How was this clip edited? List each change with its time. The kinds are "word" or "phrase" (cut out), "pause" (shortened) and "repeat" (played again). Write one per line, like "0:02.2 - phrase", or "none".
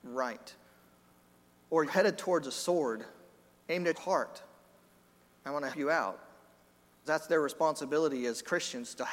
0:01.9 - word
0:03.9 - word
0:05.7 - word
0:07.0 - word